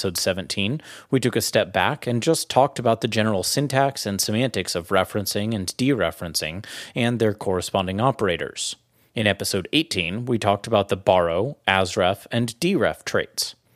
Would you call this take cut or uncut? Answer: uncut